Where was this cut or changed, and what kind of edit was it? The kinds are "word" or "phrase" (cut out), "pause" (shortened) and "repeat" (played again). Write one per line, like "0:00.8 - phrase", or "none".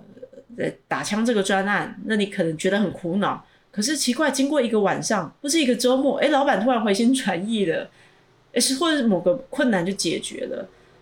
none